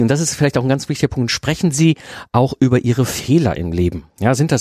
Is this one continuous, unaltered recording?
yes; 0 cuts

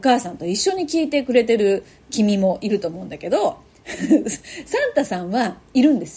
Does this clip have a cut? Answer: no; 0 cuts

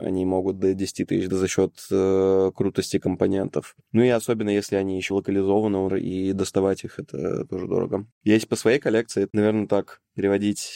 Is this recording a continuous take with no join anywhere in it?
no; 4 cuts; at 1.3 s, 5.1 s, 5.9 s, 9.3 s

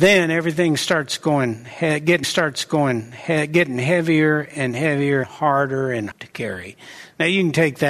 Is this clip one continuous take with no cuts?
no; 3 cuts; at 2.2 s, 5.2 s, 6.1 s

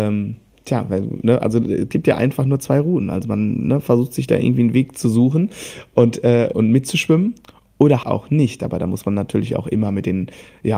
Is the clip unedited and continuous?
no; 2 cuts; at 6.5 s, 8.0 s

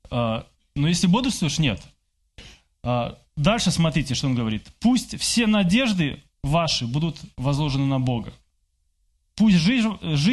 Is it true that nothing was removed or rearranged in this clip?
no; 2 cuts; at 6.3 s, 7.3 s

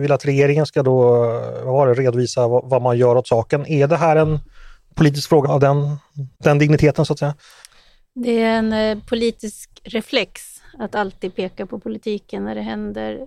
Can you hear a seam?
yes; 2 cuts; at 5.4 s, 6.3 s

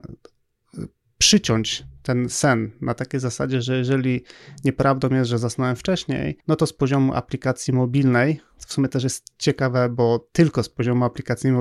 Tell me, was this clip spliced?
yes; 1 cut; at 6.4 s

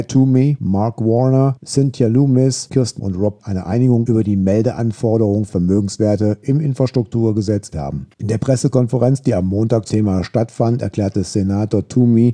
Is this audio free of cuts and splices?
no; 5 cuts; at 3.0 s, 3.4 s, 5.5 s, 7.7 s, 9.9 s

